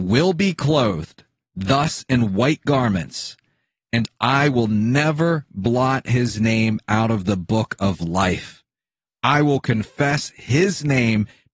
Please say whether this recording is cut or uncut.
uncut